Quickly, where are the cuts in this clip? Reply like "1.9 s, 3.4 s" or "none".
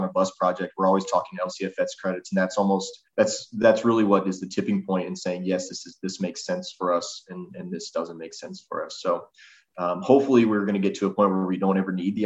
3.1 s